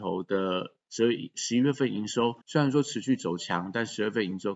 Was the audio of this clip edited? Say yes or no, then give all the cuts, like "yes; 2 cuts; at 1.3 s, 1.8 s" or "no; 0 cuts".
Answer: yes; 1 cut; at 2.4 s